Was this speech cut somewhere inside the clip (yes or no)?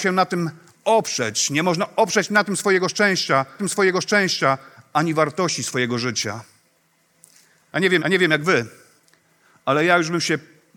yes